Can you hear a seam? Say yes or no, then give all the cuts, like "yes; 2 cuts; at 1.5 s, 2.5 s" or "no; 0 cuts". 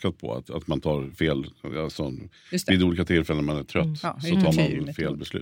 no; 0 cuts